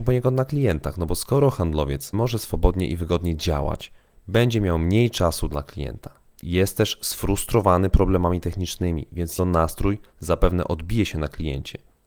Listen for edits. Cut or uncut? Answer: cut